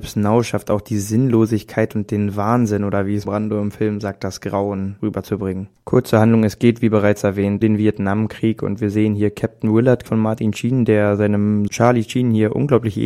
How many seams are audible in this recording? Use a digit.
4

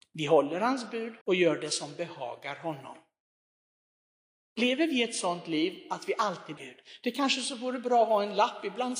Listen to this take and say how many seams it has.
2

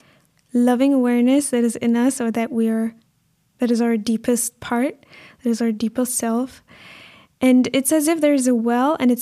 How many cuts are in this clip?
0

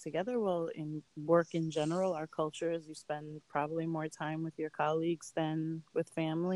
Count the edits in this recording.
0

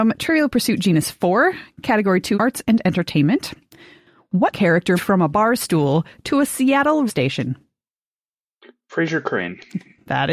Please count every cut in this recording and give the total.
5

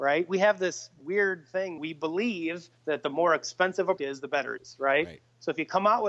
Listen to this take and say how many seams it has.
4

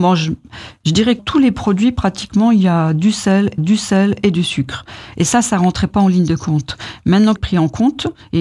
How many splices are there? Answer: 3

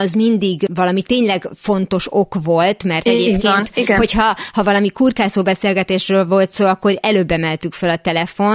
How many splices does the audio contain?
0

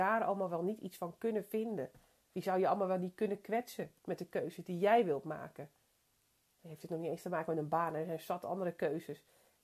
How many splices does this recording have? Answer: 1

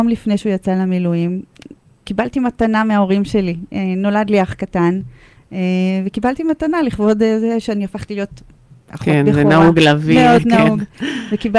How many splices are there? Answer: 0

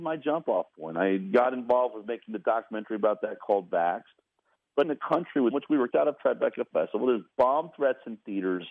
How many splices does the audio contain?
4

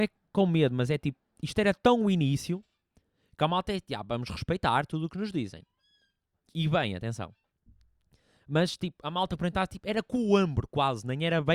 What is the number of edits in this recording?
0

